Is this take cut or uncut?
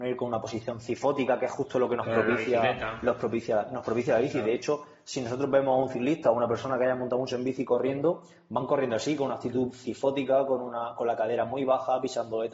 uncut